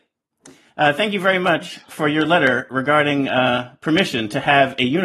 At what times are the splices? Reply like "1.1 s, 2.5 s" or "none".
none